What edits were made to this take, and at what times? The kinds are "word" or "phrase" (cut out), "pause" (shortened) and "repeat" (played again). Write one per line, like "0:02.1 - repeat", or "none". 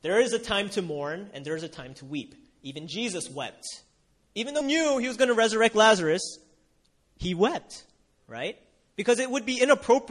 0:04.6 - word